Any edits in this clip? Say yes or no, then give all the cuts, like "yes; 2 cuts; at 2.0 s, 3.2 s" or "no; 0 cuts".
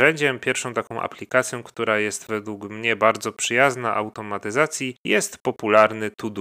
yes; 1 cut; at 5.0 s